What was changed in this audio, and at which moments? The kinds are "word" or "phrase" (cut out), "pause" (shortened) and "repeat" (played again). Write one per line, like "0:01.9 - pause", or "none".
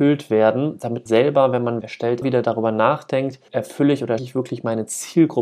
0:01.1 - word
0:01.8 - word
0:02.2 - word
0:03.5 - word
0:04.2 - word